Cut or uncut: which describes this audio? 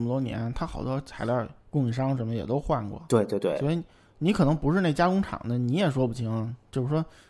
cut